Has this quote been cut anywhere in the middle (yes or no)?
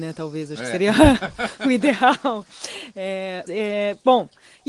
yes